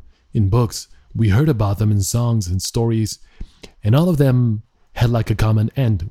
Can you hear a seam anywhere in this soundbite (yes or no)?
no